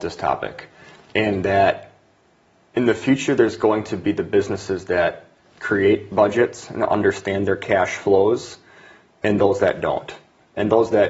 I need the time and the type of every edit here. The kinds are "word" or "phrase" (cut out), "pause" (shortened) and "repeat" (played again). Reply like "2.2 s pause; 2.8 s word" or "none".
none